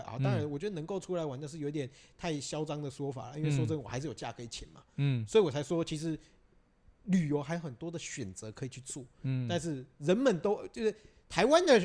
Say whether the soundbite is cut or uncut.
uncut